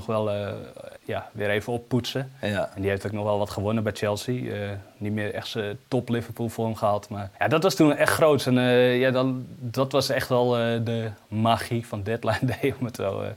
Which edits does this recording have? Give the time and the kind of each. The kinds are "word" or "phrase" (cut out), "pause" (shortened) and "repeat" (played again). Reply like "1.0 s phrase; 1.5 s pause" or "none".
1.0 s pause; 7.4 s pause